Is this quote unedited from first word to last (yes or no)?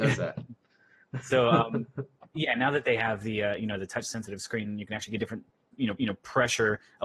no